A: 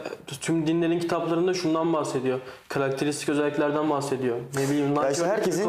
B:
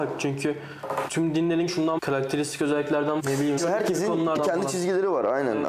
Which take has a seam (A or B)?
B